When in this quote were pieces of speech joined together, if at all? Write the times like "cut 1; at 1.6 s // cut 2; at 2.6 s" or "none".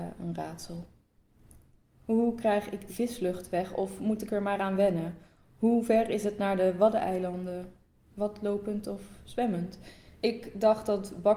cut 1; at 2.9 s